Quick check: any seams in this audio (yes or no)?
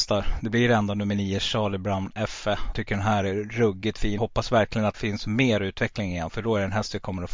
yes